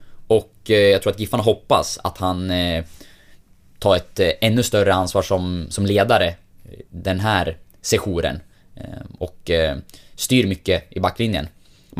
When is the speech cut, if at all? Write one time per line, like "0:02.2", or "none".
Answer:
none